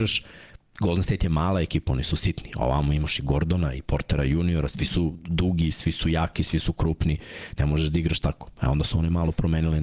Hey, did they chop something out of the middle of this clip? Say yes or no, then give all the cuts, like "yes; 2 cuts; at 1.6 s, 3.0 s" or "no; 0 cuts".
no; 0 cuts